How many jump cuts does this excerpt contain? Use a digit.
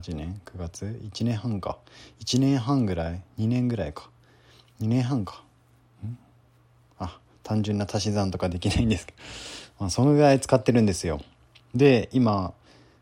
0